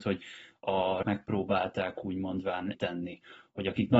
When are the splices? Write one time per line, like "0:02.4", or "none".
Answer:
0:01.0
0:02.7

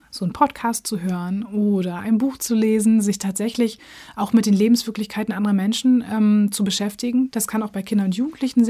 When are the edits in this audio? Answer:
none

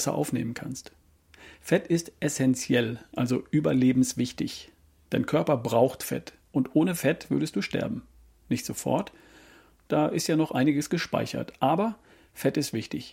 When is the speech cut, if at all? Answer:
none

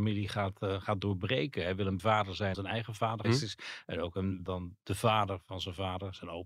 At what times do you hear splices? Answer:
0:02.0
0:02.5
0:03.2
0:04.5

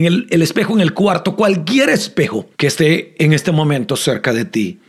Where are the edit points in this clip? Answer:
0:02.5

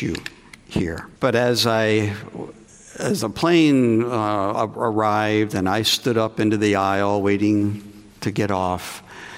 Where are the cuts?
0:01.2

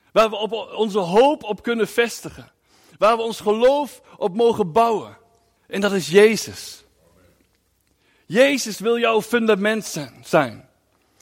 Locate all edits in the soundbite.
0:05.6

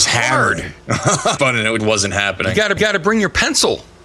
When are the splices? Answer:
0:01.4
0:01.8
0:02.8

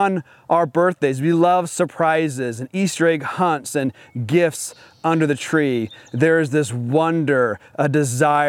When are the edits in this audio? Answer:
none

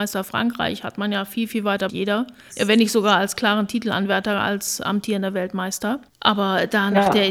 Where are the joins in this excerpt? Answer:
0:01.9

